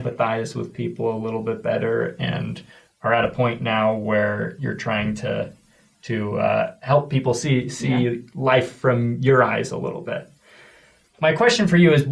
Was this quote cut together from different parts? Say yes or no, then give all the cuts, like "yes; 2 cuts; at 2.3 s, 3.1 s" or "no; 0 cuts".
no; 0 cuts